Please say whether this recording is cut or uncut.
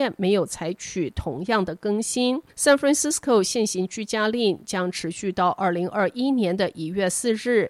cut